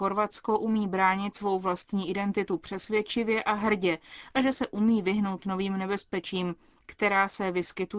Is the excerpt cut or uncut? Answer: uncut